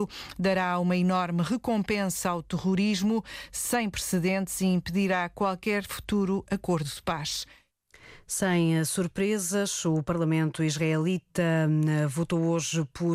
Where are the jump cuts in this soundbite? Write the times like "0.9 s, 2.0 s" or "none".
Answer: none